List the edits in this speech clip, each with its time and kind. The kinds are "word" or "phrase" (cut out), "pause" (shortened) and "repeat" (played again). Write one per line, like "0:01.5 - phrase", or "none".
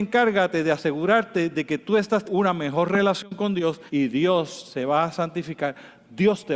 0:02.3 - word
0:03.9 - pause